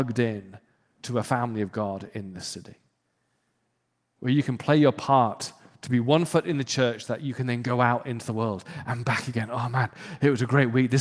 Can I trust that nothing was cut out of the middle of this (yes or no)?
yes